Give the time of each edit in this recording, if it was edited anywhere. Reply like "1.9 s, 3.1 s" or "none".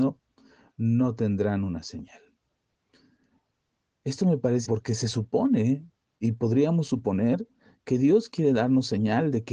4.6 s